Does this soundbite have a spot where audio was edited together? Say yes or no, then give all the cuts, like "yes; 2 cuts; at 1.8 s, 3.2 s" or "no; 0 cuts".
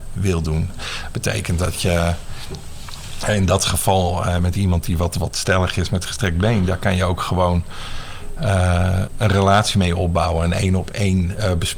no; 0 cuts